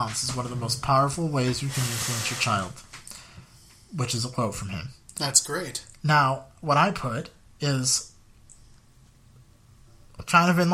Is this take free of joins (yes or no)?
yes